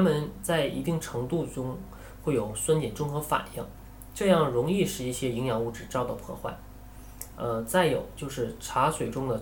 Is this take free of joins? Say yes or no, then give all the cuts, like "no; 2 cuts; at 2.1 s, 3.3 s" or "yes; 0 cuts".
yes; 0 cuts